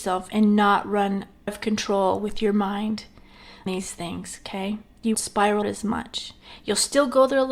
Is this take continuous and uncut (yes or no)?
no